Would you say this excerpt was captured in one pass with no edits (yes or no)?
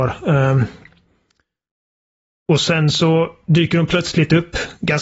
yes